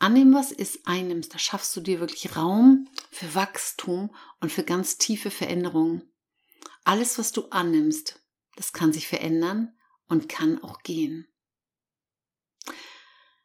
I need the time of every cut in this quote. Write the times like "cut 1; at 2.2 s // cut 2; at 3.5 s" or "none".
none

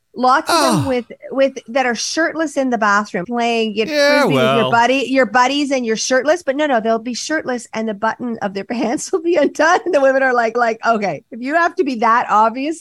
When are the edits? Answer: cut 1; at 3.2 s // cut 2; at 3.9 s // cut 3; at 10.5 s

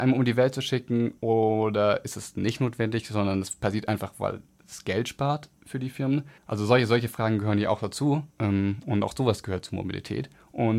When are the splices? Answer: cut 1; at 1.2 s // cut 2; at 5.6 s // cut 3; at 6.4 s // cut 4; at 8.3 s

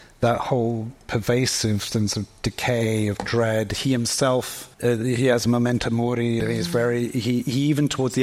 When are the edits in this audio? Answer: cut 1; at 4.7 s // cut 2; at 6.4 s

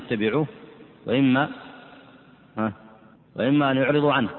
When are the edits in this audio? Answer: cut 1; at 3.1 s

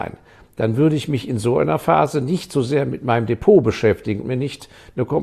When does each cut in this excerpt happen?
cut 1; at 4.2 s

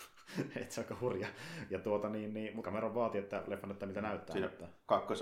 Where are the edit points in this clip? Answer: cut 1; at 2.6 s

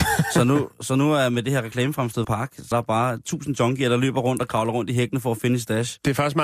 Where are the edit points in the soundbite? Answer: cut 1; at 2.2 s // cut 2; at 2.7 s

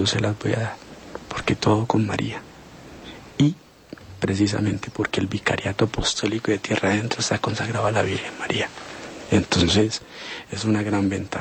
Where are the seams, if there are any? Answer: none

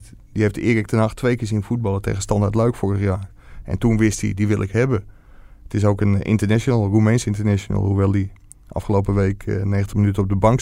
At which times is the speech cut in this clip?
none

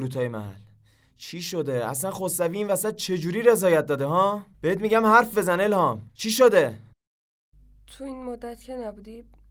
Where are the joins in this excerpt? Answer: cut 1; at 4.5 s // cut 2; at 6.1 s

